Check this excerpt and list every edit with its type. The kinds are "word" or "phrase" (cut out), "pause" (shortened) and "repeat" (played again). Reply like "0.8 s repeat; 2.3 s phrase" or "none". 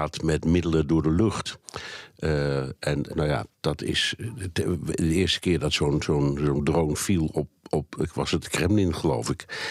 3.1 s word; 3.5 s word